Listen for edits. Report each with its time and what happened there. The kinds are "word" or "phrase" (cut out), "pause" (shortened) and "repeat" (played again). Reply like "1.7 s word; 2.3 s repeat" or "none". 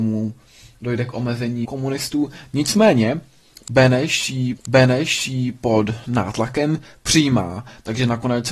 1.6 s word; 4.6 s repeat